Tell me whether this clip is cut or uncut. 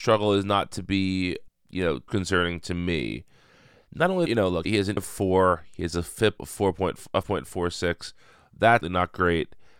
cut